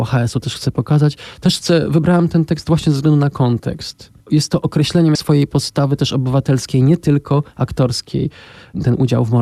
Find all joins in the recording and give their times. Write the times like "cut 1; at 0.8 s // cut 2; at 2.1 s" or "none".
cut 1; at 4.2 s // cut 2; at 5.2 s